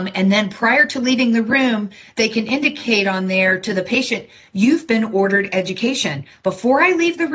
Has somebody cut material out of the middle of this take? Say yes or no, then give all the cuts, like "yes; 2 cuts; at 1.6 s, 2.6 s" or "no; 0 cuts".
no; 0 cuts